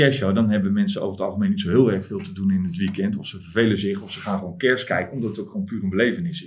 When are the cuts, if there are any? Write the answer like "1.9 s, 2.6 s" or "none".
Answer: none